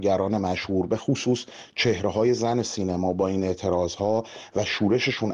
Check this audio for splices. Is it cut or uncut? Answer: uncut